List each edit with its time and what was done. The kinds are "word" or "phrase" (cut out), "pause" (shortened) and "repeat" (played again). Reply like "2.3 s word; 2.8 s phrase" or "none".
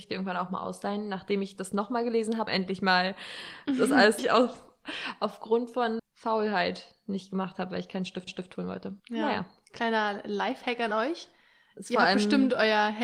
2.5 s word; 4.2 s phrase; 6.0 s word; 8.3 s repeat; 9.0 s pause